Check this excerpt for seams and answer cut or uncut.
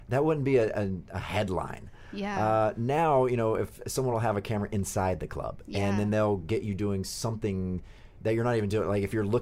uncut